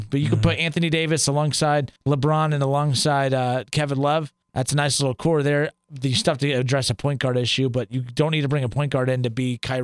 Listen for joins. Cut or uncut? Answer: cut